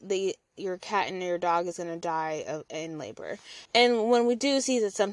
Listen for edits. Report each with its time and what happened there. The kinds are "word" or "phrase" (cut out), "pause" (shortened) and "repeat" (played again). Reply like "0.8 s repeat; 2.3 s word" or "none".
3.7 s pause